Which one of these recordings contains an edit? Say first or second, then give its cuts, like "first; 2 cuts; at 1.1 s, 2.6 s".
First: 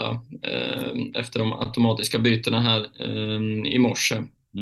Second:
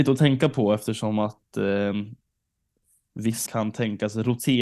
second; 1 cut; at 3.5 s